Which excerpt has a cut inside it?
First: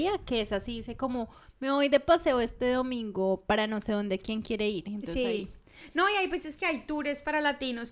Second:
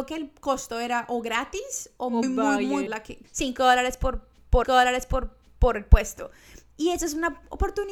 second; 4 cuts; at 2.2 s, 2.9 s, 3.2 s, 4.6 s

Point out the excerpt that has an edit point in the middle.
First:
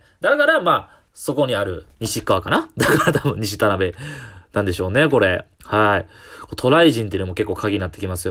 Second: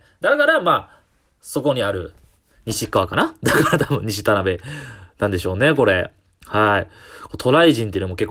first; 3 cuts; at 1.1 s, 1.9 s, 5.5 s

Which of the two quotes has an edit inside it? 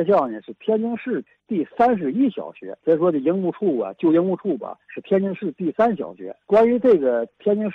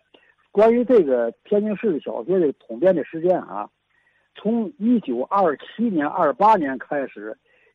first; 3 cuts; at 2.8 s, 4.8 s, 6.4 s

